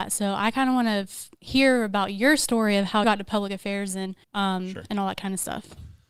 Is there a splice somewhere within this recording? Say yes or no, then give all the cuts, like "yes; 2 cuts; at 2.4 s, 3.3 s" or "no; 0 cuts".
yes; 3 cuts; at 1.4 s, 3.0 s, 4.2 s